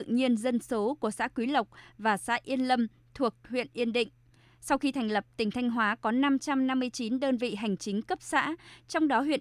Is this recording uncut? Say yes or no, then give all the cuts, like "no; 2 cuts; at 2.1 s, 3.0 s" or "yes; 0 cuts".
yes; 0 cuts